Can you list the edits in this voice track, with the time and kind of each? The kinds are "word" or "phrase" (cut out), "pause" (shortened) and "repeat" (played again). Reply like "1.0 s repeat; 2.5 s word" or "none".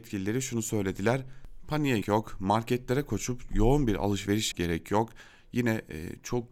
2.0 s word; 3.5 s word; 4.5 s word